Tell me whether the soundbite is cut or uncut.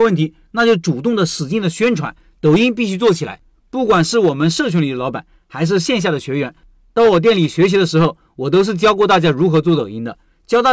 uncut